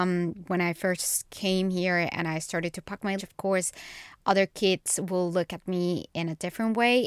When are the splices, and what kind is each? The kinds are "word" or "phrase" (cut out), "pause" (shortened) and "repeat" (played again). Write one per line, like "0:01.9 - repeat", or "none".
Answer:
0:03.2 - word